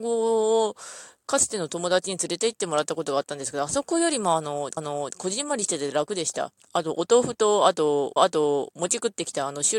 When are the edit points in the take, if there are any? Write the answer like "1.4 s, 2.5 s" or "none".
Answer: 4.8 s, 6.6 s, 8.2 s

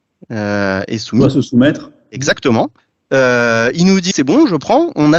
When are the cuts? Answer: 4.1 s

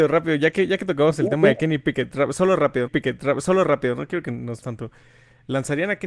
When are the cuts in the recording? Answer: 2.9 s, 4.6 s

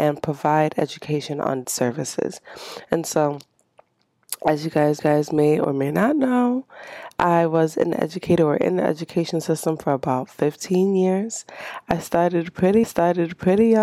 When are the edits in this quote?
1.6 s, 5.0 s, 12.8 s

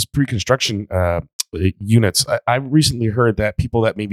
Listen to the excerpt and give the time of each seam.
none

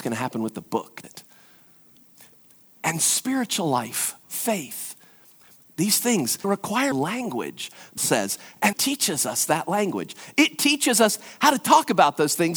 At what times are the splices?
1.0 s, 4.2 s, 6.4 s, 6.9 s, 8.0 s, 8.7 s

